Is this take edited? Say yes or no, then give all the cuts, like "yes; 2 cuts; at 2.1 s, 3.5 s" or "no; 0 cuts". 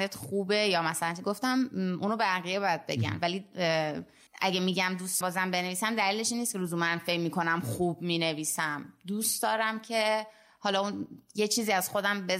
yes; 2 cuts; at 4.3 s, 5.2 s